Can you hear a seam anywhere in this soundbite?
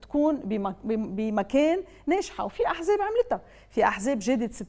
no; 0 cuts

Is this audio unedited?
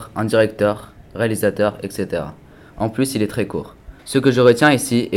no; 1 cut; at 4.0 s

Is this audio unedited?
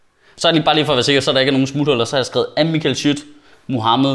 yes; 0 cuts

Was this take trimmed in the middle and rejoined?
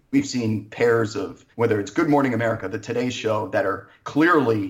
yes; 1 cut; at 1.5 s

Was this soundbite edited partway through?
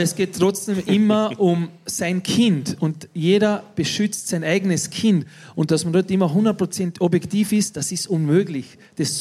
no; 0 cuts

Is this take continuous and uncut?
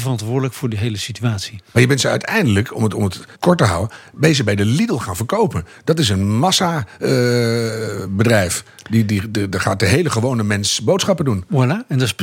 no; 1 cut; at 3.3 s

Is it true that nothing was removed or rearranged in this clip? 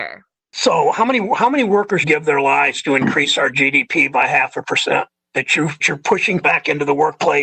no; 3 cuts; at 2.0 s, 5.8 s, 6.4 s

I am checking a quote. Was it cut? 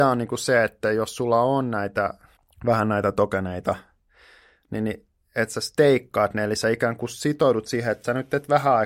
yes; 1 cut; at 2.4 s

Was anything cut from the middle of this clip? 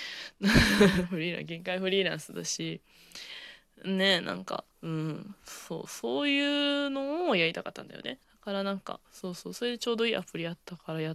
yes; 3 cuts; at 4.7 s, 8.2 s, 9.0 s

